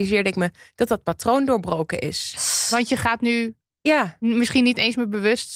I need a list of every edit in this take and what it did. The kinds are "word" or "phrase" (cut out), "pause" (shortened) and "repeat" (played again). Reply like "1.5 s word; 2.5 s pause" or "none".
none